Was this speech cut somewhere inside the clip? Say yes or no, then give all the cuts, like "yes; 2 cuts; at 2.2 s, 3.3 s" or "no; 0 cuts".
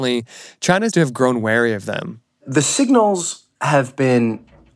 yes; 2 cuts; at 0.9 s, 2.3 s